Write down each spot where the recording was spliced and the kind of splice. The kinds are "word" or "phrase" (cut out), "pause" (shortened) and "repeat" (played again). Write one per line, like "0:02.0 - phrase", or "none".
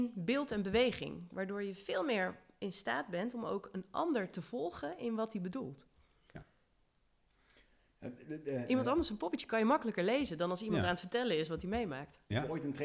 none